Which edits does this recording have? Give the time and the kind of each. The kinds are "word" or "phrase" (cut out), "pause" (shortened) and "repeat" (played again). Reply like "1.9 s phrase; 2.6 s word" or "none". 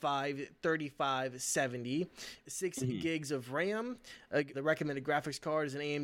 2.4 s word; 4.5 s word